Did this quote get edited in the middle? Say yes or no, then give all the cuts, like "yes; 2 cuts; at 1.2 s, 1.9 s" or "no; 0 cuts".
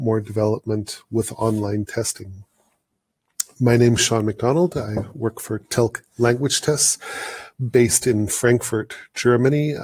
no; 0 cuts